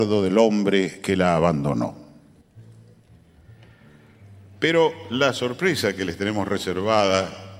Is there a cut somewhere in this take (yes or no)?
no